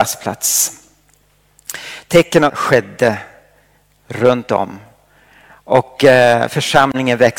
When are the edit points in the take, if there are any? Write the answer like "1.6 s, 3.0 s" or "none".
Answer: 2.5 s